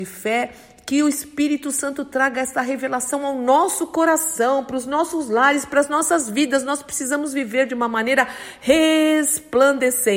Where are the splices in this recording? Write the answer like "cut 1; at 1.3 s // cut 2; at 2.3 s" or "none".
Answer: none